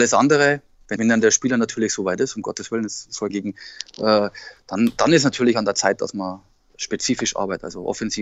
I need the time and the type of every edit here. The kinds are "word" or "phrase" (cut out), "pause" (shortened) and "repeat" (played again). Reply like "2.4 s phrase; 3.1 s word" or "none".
1.0 s word; 3.3 s phrase